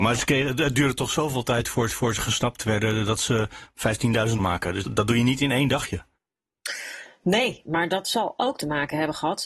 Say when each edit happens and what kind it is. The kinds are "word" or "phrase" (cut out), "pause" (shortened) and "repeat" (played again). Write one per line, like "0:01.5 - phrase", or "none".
0:01.9 - repeat
0:04.4 - phrase
0:04.8 - word

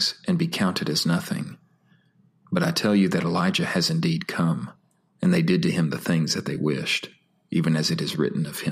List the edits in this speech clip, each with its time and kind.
none

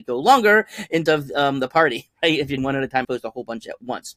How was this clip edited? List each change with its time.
0:01.1 - word
0:02.6 - word
0:03.0 - word

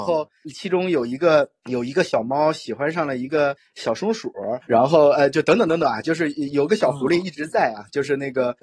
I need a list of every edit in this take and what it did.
0:04.6 - pause

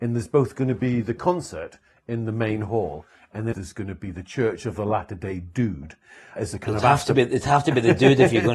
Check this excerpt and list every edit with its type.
0:03.5 - word
0:06.4 - word

